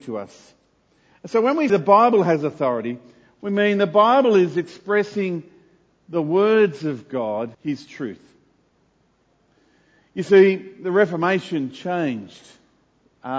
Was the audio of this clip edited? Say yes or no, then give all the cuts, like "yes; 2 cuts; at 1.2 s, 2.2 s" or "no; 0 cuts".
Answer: yes; 2 cuts; at 1.7 s, 7.5 s